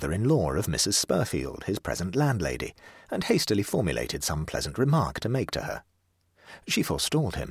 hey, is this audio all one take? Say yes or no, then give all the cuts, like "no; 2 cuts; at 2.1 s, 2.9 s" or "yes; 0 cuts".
yes; 0 cuts